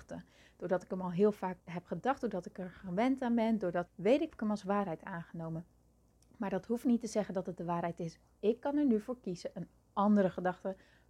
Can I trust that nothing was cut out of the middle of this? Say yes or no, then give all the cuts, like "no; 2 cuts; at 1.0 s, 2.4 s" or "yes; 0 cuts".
no; 3 cuts; at 1.6 s, 3.9 s, 4.3 s